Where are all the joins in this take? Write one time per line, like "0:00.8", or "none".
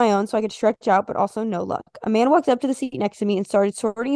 none